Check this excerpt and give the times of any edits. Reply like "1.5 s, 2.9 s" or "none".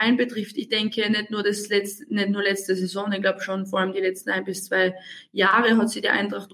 none